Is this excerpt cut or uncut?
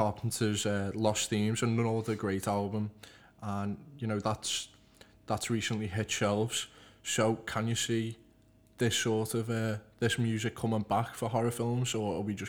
uncut